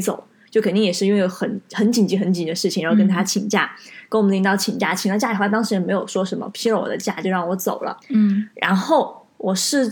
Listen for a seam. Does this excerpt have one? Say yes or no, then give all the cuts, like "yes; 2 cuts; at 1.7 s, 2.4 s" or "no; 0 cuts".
yes; 1 cut; at 8.0 s